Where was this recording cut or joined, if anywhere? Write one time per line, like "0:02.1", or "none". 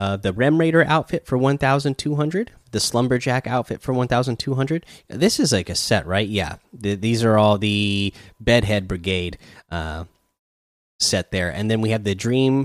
0:02.6